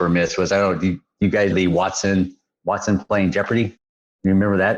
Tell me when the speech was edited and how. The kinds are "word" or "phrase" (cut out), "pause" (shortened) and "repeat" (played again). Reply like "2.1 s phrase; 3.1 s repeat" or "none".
1.5 s word

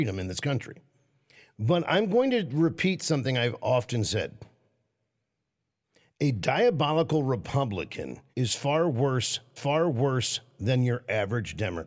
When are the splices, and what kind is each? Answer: 8.3 s pause; 9.6 s repeat

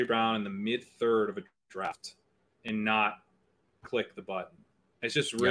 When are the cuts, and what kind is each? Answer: none

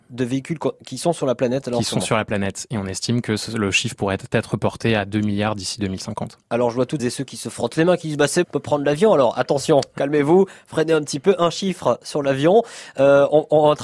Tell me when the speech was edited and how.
7.0 s word; 8.4 s word

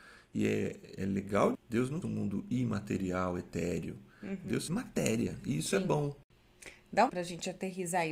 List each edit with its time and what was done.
1.5 s word; 2.0 s word; 4.7 s word; 7.1 s word

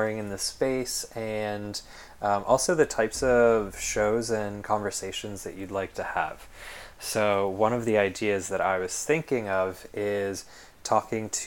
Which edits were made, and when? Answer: none

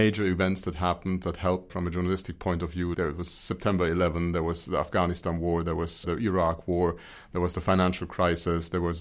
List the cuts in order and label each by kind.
1.7 s word; 2.9 s word; 6.0 s word

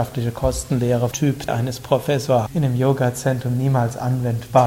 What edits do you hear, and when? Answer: 1.1 s word; 1.5 s word; 2.5 s word

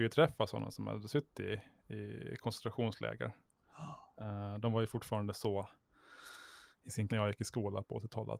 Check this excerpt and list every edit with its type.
7.1 s word

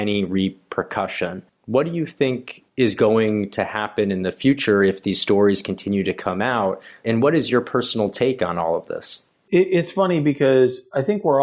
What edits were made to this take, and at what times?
2.7 s pause

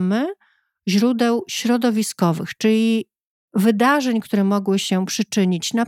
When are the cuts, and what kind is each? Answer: none

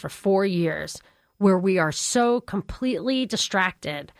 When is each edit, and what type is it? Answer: none

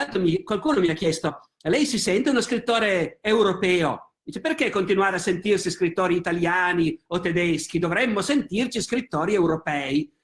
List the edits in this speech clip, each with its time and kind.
none

